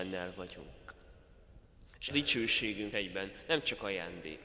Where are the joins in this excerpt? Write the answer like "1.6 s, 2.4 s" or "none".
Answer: 2.1 s, 2.9 s